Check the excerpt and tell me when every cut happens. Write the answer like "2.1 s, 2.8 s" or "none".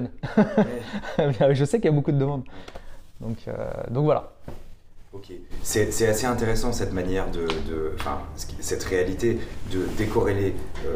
none